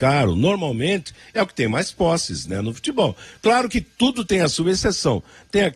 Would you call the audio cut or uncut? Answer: uncut